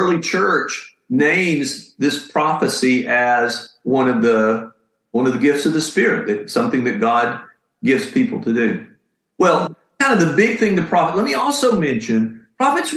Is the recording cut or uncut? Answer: uncut